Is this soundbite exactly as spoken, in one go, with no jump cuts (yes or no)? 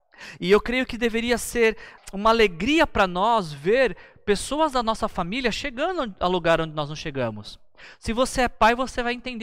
no